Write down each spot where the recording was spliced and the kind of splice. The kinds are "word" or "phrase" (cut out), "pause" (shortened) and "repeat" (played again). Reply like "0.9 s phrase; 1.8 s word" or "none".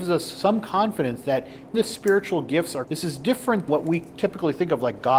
1.7 s word; 2.8 s word; 3.7 s word